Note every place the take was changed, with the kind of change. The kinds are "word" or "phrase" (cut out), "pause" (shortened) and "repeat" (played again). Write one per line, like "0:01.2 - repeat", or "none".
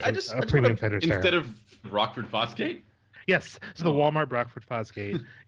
0:01.8 - word
0:03.8 - word
0:04.3 - word